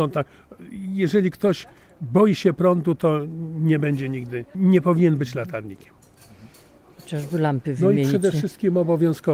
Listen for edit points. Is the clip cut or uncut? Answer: cut